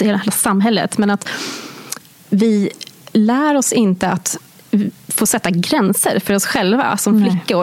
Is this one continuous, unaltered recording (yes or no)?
yes